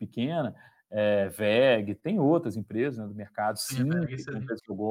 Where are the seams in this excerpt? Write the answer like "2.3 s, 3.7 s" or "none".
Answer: none